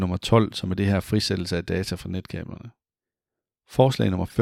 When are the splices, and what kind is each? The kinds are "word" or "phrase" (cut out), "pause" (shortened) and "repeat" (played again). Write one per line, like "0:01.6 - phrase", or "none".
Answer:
none